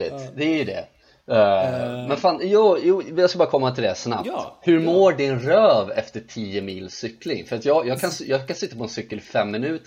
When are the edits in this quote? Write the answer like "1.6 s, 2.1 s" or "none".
none